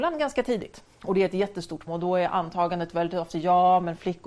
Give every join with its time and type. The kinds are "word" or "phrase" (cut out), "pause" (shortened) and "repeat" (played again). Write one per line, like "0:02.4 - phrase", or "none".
0:00.9 - pause
0:01.9 - word